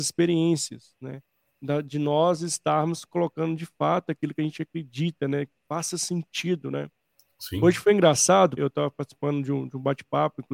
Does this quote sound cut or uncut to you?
cut